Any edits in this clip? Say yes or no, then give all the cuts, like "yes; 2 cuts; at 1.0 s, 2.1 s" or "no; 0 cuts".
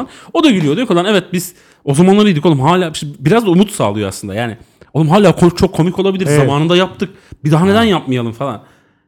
no; 0 cuts